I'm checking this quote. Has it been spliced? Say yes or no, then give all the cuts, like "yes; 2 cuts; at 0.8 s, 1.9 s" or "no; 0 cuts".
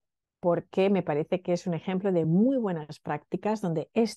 no; 0 cuts